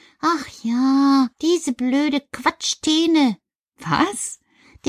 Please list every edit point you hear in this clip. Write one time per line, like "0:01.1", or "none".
0:01.3